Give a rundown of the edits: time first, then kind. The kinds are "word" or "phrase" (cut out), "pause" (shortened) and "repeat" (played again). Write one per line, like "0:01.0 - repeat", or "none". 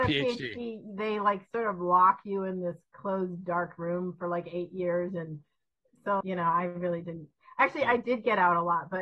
0:06.2 - word